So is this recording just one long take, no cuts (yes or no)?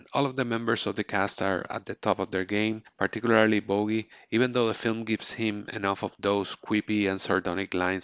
yes